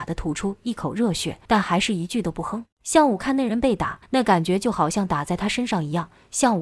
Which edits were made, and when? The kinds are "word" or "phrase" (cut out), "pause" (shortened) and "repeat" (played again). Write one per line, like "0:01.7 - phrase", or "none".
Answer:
0:01.4 - pause
0:02.7 - pause
0:04.0 - pause